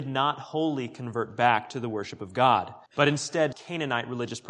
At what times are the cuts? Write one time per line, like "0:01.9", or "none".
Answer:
0:02.9
0:03.5